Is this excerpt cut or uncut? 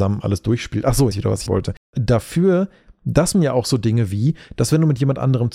cut